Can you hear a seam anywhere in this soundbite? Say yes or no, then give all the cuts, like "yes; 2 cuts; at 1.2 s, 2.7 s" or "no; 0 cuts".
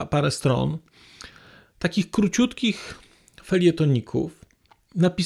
no; 0 cuts